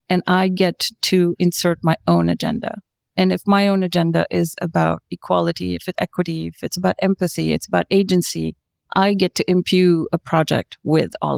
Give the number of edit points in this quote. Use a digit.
1